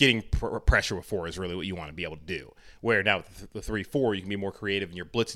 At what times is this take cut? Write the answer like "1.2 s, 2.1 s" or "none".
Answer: none